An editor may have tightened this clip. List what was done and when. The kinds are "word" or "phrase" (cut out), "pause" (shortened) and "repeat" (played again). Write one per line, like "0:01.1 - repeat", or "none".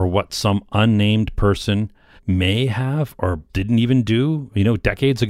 0:02.2 - pause
0:03.5 - word